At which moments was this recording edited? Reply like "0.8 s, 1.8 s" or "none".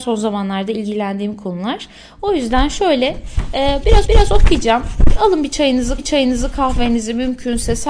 4.0 s, 6.0 s